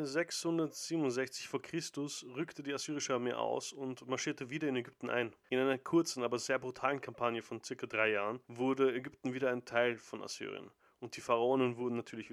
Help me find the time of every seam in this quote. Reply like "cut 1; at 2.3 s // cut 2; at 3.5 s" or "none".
cut 1; at 5.4 s // cut 2; at 8.4 s